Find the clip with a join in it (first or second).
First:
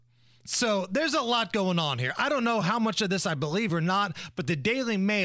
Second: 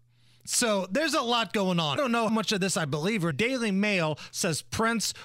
second